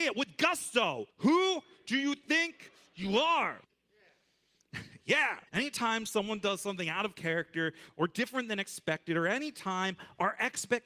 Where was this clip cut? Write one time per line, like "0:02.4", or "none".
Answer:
0:01.1
0:03.6
0:05.5